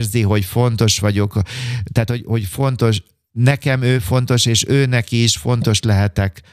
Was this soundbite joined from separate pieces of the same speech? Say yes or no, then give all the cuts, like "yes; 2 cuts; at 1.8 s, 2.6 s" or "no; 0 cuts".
no; 0 cuts